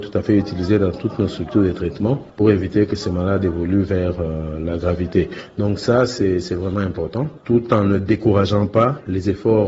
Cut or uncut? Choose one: uncut